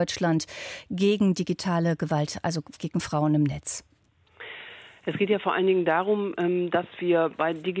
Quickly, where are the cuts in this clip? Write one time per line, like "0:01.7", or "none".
0:02.8